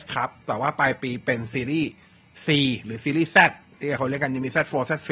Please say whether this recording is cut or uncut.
uncut